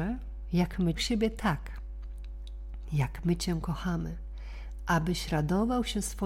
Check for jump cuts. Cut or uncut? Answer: cut